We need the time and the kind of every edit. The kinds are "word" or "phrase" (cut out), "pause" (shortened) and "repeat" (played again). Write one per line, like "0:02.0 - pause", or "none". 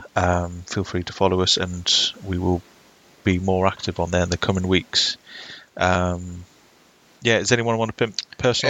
none

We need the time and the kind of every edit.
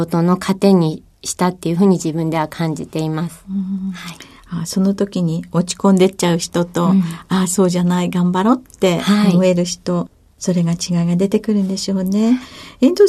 none

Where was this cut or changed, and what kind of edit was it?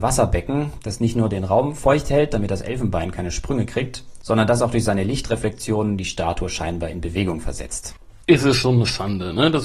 0:08.2 - pause

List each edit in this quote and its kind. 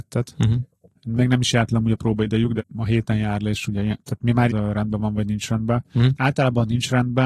0:02.6 - word
0:04.5 - phrase

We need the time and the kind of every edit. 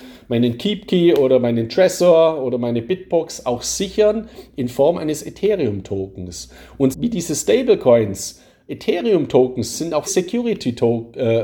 0:06.9 - word
0:09.7 - word
0:10.1 - word

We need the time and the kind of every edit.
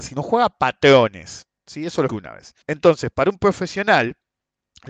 0:02.1 - word
0:02.6 - pause

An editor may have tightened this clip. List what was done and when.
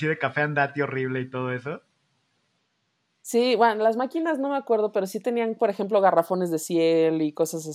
none

